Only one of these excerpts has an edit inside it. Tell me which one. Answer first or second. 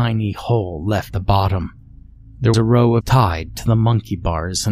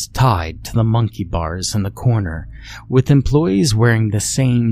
first